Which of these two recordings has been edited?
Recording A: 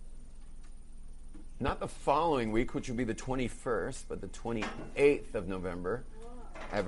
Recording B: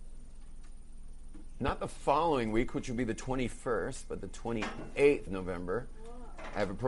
B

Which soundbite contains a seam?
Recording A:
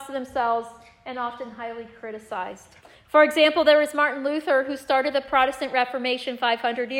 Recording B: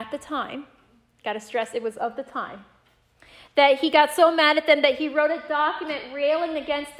A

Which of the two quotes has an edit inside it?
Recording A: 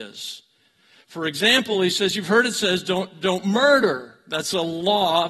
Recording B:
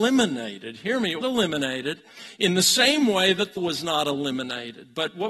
B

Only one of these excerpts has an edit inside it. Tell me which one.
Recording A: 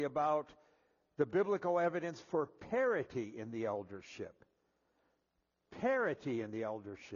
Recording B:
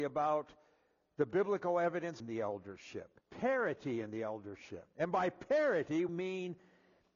B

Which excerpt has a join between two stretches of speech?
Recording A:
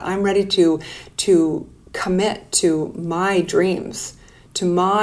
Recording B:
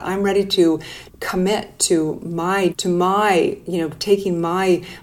B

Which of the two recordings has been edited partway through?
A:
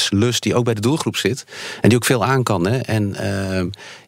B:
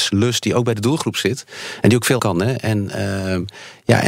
B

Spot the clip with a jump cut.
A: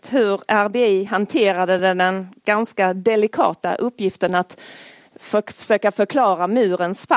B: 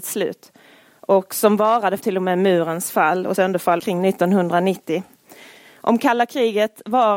B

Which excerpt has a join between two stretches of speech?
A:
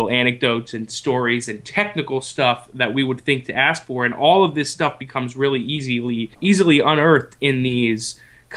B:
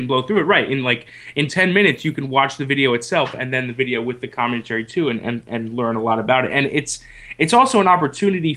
A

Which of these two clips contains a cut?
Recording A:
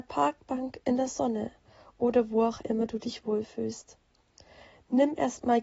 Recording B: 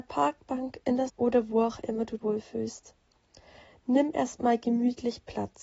B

